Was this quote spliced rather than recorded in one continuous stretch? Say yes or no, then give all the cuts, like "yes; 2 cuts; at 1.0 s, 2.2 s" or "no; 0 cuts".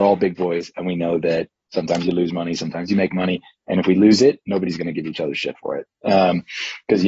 no; 0 cuts